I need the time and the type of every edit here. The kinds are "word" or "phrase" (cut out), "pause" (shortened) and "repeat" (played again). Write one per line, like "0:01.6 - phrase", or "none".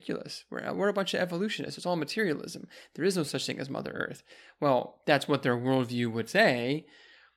none